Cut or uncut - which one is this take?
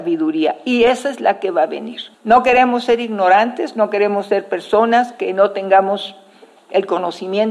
cut